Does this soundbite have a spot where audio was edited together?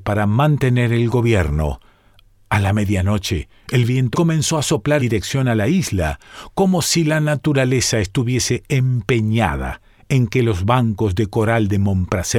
yes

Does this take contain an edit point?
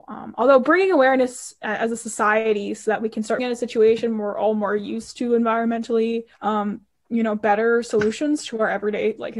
yes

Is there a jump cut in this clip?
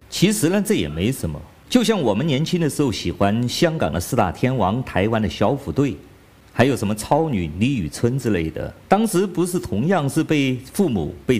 no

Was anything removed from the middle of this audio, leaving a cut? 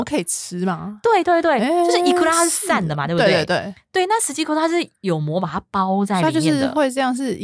no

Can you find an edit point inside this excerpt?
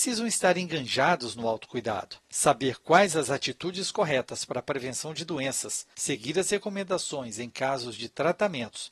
yes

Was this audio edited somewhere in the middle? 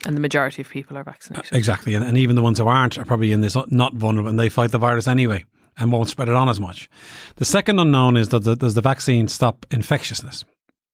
no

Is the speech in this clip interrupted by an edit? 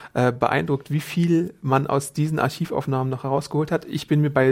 no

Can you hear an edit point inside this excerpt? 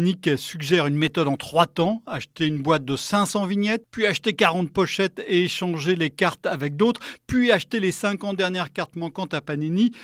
no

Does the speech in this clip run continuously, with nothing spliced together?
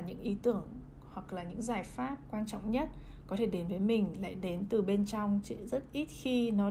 yes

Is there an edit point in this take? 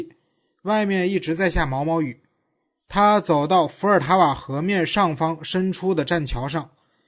no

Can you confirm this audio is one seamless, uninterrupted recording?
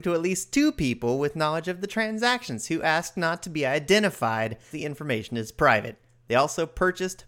no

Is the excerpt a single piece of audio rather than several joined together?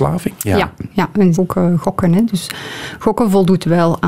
no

